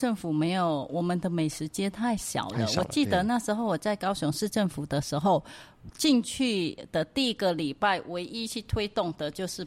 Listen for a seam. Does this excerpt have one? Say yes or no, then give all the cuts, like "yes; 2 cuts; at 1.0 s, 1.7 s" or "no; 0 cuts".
no; 0 cuts